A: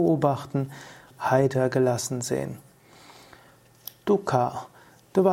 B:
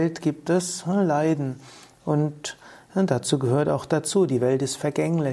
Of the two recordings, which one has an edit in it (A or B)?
A